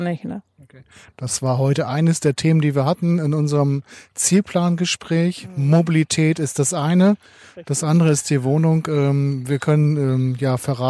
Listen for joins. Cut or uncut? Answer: uncut